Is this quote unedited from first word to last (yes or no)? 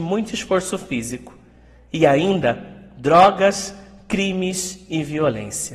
yes